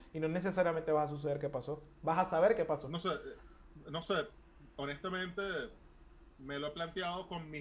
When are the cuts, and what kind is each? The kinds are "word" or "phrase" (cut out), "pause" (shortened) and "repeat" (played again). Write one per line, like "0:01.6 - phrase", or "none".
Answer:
none